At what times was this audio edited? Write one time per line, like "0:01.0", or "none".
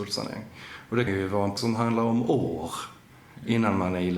0:01.1
0:01.6